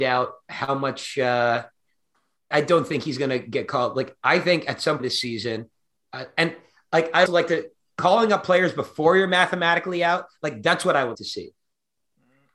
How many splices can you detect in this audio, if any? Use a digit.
4